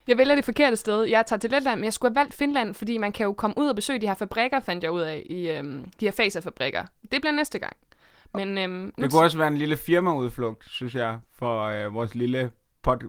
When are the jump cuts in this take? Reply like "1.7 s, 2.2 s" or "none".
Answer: none